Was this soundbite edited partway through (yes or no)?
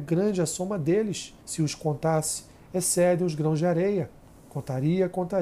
yes